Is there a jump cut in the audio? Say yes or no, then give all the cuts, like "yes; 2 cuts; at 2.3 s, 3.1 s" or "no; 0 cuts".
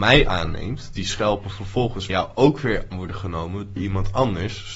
yes; 4 cuts; at 1.0 s, 2.1 s, 2.9 s, 3.8 s